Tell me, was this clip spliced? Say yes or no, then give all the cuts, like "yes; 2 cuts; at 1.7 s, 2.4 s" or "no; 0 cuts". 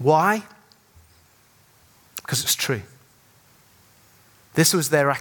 no; 0 cuts